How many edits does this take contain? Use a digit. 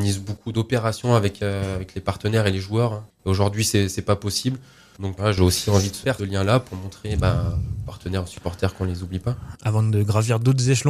2